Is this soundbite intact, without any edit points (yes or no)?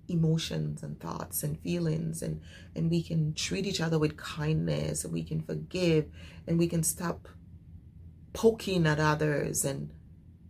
yes